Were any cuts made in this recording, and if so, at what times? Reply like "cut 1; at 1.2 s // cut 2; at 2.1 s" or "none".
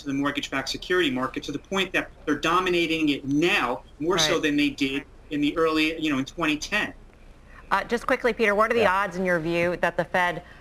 none